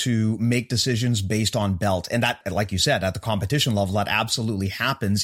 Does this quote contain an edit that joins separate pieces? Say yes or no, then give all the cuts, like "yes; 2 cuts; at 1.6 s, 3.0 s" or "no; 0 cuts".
no; 0 cuts